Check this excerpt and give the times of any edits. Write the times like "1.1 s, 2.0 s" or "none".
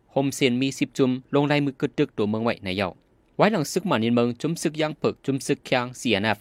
5.2 s